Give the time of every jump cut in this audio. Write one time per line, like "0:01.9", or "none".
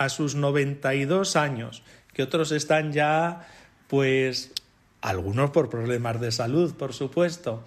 none